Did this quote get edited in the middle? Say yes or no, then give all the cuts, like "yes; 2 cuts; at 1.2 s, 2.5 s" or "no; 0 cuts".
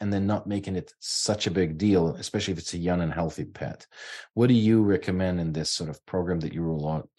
no; 0 cuts